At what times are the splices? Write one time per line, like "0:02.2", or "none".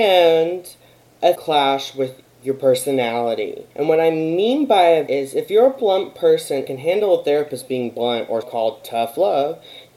0:01.4
0:03.7
0:05.1
0:06.7
0:08.4